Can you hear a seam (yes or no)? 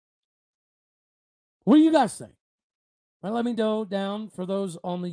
no